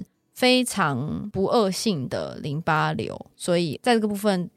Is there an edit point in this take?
yes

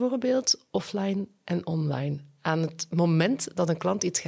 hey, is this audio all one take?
yes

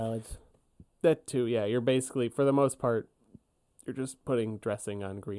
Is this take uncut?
yes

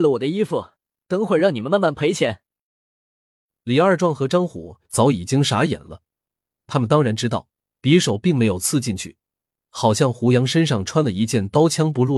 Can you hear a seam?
no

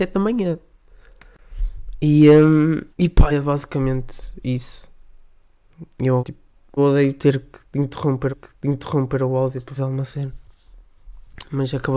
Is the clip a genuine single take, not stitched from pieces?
no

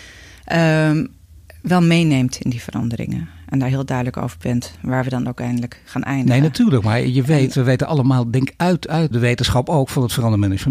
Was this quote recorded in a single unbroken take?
no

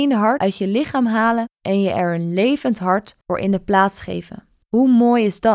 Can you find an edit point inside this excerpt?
yes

